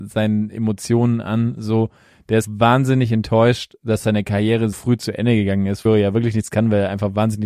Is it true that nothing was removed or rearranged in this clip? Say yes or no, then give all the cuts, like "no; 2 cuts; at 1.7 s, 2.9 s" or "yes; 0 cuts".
no; 3 cuts; at 2.4 s, 4.7 s, 5.9 s